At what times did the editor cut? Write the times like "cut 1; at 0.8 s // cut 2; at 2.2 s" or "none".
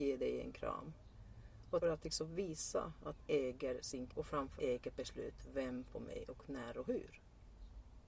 cut 1; at 1.8 s // cut 2; at 3.3 s // cut 3; at 4.1 s // cut 4; at 4.6 s // cut 5; at 5.9 s